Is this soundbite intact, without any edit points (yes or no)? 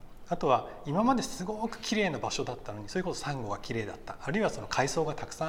yes